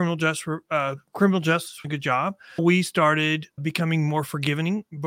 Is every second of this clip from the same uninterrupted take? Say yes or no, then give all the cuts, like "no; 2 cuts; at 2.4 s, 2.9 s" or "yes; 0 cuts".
no; 4 cuts; at 1.1 s, 1.8 s, 2.6 s, 3.6 s